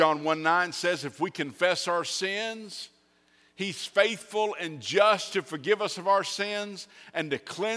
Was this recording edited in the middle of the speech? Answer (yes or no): no